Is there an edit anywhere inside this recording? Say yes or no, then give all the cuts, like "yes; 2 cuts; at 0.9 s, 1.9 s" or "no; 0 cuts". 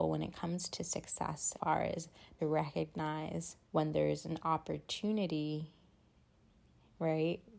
yes; 3 cuts; at 1.5 s, 2.4 s, 3.6 s